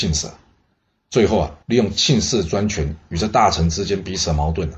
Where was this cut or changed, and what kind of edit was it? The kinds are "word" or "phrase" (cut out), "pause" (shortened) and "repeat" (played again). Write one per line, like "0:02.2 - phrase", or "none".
0:01.6 - pause